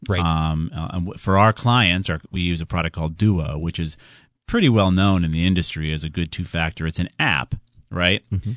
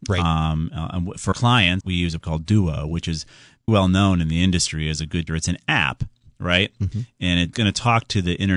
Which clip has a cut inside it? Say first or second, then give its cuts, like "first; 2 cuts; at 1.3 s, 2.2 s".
second; 6 cuts; at 1.3 s, 1.8 s, 2.2 s, 3.7 s, 5.3 s, 7.5 s